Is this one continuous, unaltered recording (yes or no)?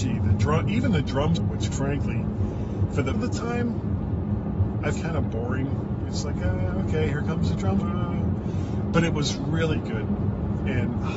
no